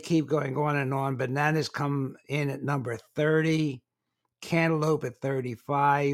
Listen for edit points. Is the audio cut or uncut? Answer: uncut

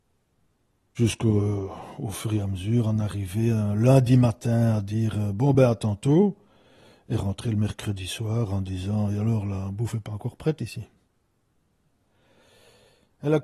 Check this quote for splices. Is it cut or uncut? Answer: uncut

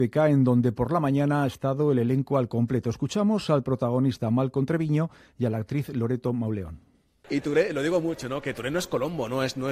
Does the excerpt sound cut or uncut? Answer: uncut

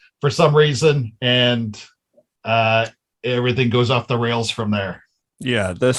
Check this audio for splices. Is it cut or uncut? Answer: uncut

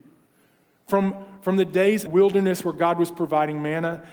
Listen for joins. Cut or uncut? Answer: cut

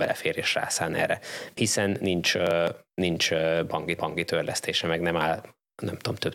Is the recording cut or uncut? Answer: cut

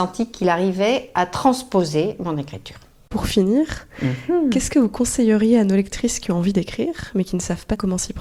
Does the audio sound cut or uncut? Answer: uncut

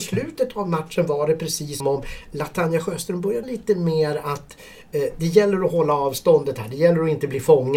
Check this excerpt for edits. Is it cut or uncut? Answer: cut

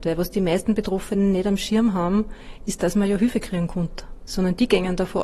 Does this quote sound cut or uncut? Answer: uncut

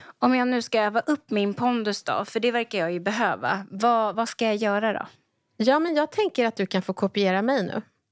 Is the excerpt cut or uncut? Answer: uncut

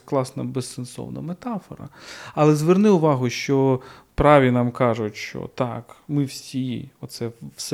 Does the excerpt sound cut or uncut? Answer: uncut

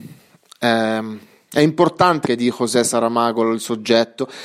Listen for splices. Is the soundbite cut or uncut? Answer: cut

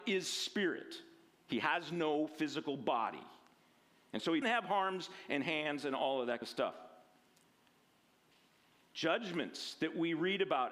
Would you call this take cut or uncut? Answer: cut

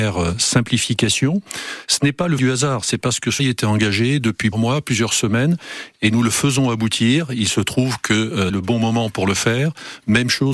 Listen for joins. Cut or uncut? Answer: cut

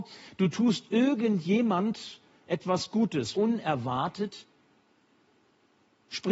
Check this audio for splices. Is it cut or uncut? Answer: cut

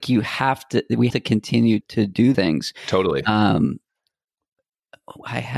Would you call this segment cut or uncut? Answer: cut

